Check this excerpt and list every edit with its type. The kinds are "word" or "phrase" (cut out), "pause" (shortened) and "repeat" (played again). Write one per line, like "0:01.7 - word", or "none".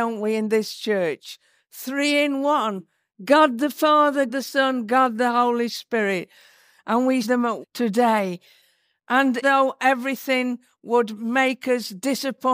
0:04.3 - word
0:07.2 - word
0:07.6 - word
0:09.4 - word

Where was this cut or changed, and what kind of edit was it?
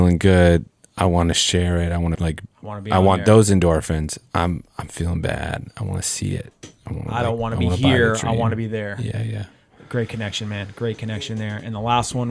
0:02.1 - word

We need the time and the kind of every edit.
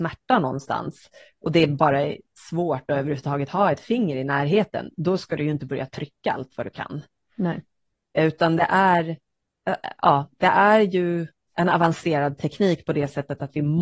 none

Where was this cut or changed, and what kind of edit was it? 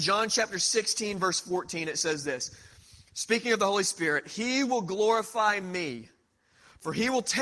none

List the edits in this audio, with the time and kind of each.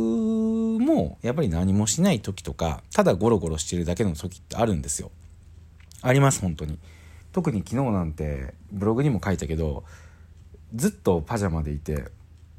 0:02.9 - pause
0:07.2 - pause

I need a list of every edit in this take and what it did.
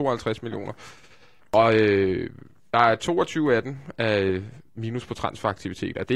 none

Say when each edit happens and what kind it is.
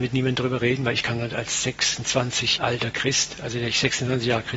0:02.6 - word

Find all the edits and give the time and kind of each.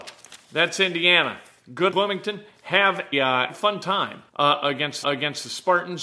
0:01.9 - phrase
0:03.1 - word
0:03.5 - word
0:04.3 - pause
0:05.0 - repeat

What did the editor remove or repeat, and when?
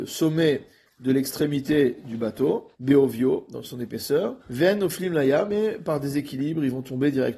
0:02.7 - pause
0:04.4 - pause

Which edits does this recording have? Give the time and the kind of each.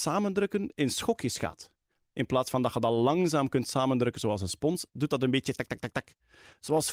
0:05.6 - word

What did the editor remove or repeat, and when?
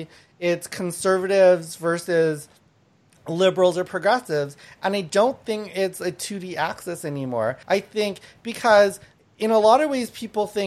0:07.6 - pause

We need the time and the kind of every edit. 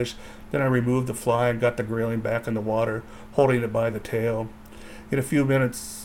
none

